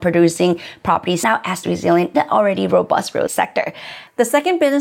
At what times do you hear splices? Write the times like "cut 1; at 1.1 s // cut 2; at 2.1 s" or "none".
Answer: cut 1; at 1.2 s // cut 2; at 1.6 s // cut 3; at 2.1 s // cut 4; at 3.3 s

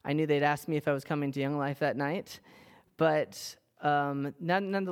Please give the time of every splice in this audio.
none

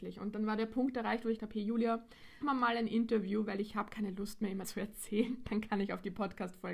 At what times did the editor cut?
cut 1; at 1.4 s // cut 2; at 2.4 s // cut 3; at 4.6 s

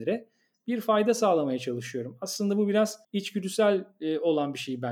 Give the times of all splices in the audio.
cut 1; at 3.0 s

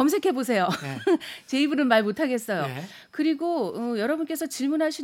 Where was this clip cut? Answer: none

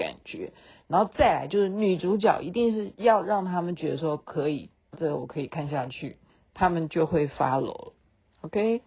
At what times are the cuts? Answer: cut 1; at 4.9 s // cut 2; at 6.3 s

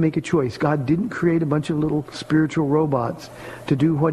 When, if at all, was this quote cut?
none

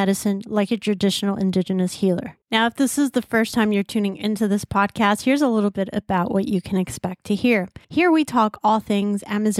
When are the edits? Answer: cut 1; at 2.4 s // cut 2; at 7.8 s

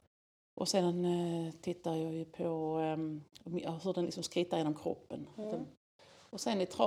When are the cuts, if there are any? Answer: none

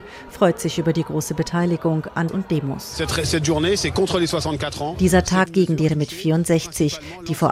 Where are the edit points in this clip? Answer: cut 1; at 2.3 s // cut 2; at 5.5 s // cut 3; at 5.9 s

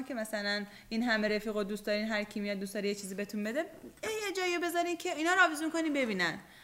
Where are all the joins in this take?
none

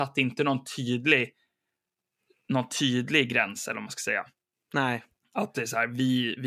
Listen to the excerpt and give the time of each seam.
none

